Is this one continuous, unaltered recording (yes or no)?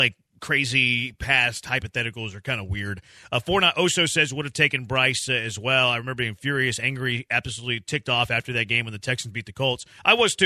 yes